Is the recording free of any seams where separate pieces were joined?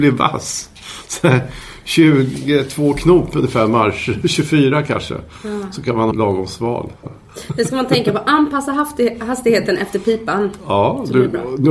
no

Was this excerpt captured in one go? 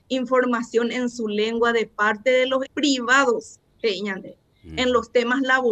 no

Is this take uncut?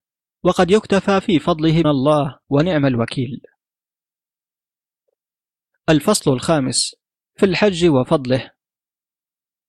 no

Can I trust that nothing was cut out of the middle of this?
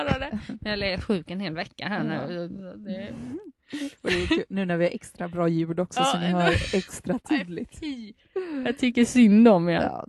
yes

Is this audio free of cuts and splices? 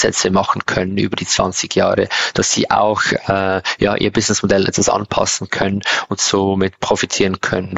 yes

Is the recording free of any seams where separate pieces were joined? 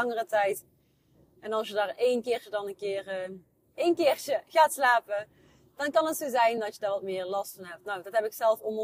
yes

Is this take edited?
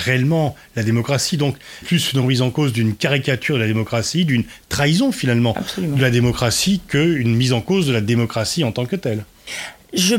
yes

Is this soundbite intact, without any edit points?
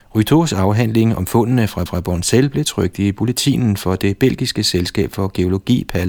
no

